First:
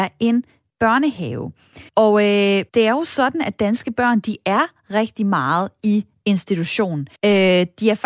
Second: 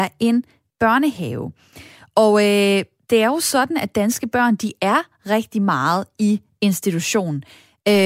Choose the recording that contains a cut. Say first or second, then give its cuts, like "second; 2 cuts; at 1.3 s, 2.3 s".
first; 3 cuts; at 1.9 s, 2.7 s, 7.2 s